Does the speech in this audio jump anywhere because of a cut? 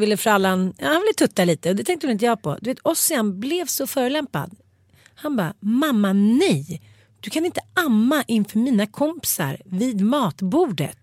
no; 0 cuts

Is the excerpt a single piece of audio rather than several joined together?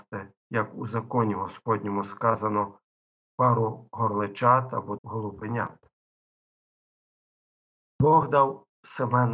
no; 1 cut; at 5.0 s

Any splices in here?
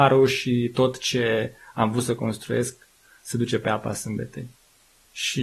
no; 0 cuts

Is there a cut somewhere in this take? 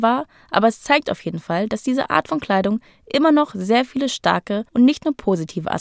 yes; 1 cut; at 4.7 s

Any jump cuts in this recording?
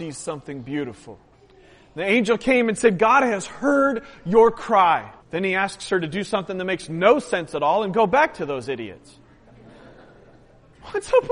yes; 2 cuts; at 1.3 s, 5.2 s

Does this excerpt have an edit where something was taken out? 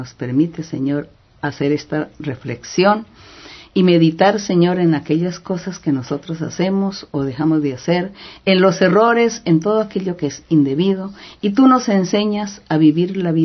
no; 0 cuts

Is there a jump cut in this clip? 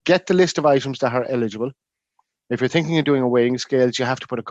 no; 0 cuts

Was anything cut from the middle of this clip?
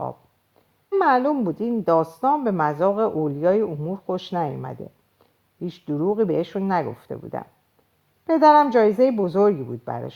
yes; 1 cut; at 0.9 s

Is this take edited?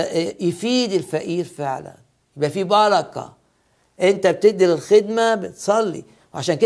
no; 0 cuts

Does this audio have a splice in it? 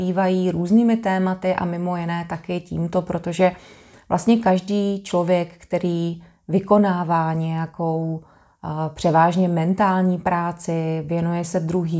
no; 0 cuts

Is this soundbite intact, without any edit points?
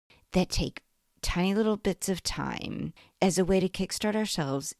yes; 0 cuts

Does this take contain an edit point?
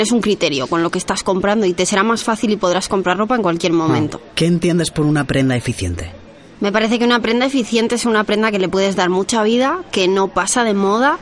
yes; 1 cut; at 4.3 s

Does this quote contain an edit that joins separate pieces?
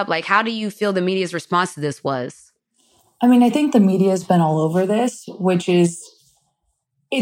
no; 0 cuts

